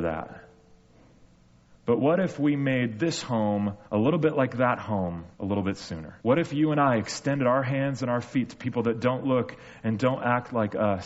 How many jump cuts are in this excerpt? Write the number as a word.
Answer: three